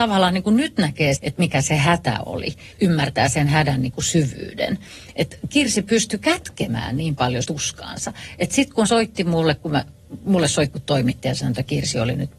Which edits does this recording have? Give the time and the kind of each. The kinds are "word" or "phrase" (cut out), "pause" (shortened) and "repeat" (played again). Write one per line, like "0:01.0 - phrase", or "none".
0:01.2 - word
0:02.7 - word
0:07.4 - word
0:08.9 - word
0:10.7 - word